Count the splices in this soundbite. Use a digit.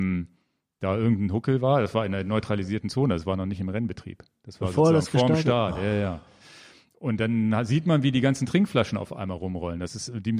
0